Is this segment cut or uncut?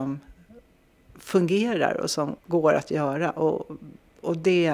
cut